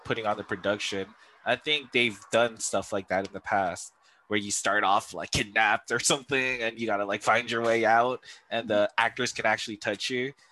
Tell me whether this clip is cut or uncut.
uncut